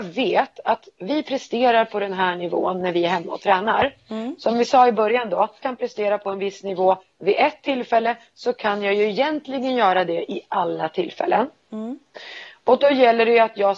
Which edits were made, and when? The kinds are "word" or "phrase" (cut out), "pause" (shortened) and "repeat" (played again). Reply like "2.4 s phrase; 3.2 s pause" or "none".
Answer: 5.6 s phrase